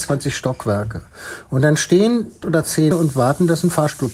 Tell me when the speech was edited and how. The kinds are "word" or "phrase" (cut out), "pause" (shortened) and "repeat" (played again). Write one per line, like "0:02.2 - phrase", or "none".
0:02.4 - word
0:02.9 - word